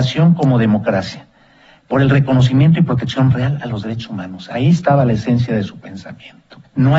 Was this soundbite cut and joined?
no; 0 cuts

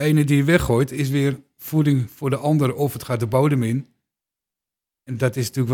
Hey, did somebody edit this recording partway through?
no; 0 cuts

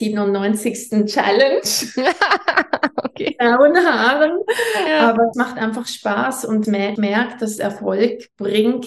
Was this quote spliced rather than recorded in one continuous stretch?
yes; 4 cuts; at 5.3 s, 6.6 s, 7.0 s, 7.6 s

